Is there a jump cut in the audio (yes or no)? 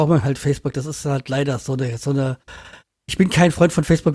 no